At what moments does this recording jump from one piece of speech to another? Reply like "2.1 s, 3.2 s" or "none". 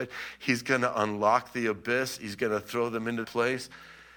3.2 s